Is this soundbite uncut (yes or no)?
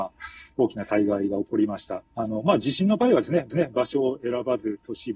no